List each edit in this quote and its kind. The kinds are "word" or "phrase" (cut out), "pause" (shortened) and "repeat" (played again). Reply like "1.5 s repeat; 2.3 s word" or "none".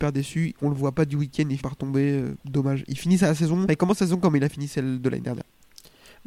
1.6 s word; 2.4 s pause; 3.7 s word